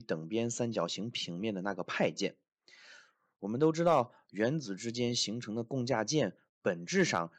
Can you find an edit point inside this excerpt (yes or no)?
no